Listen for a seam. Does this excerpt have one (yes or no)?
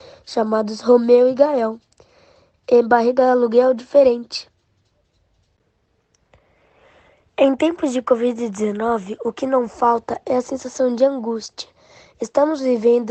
no